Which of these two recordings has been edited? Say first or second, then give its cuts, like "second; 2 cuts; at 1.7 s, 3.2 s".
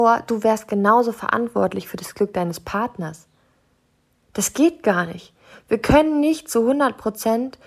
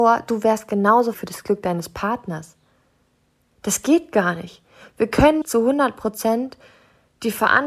second; 2 cuts; at 1.1 s, 5.4 s